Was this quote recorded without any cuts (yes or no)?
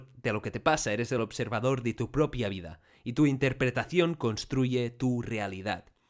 yes